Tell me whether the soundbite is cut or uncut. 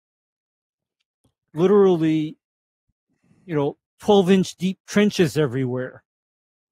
cut